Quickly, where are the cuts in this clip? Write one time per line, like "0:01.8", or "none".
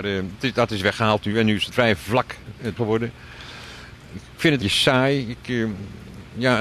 0:01.7
0:02.8
0:04.6